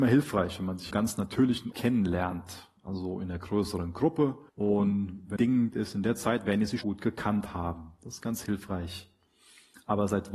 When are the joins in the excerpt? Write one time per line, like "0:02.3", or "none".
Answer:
0:00.9
0:01.7
0:02.8
0:04.5
0:05.4
0:05.7
0:06.8